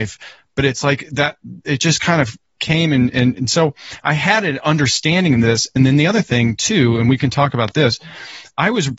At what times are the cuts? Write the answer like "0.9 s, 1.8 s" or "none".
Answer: none